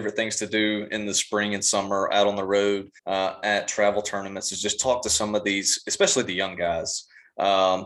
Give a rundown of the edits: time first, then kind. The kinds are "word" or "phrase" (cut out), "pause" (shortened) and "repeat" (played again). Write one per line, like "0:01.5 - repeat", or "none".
0:03.0 - pause